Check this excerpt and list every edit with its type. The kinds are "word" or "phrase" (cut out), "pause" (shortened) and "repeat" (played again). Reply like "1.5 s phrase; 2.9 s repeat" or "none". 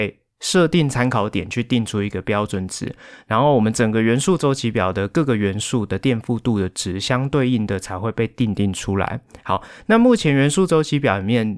none